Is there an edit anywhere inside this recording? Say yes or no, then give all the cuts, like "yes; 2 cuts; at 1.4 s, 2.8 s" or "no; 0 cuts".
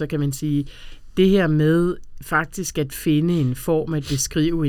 no; 0 cuts